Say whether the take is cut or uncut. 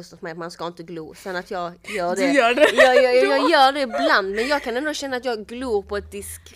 uncut